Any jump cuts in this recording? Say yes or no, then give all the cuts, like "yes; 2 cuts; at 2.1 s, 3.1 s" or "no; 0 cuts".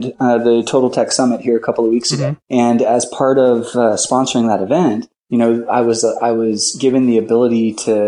yes; 2 cuts; at 2.4 s, 5.2 s